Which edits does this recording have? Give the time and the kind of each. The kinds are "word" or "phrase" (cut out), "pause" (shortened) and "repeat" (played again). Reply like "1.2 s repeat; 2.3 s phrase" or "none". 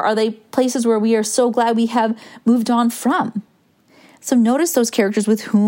none